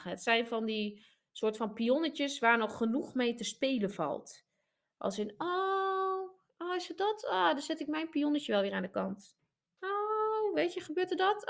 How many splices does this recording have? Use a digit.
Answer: 0